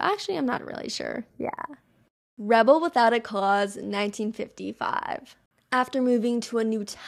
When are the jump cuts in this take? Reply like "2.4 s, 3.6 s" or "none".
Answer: none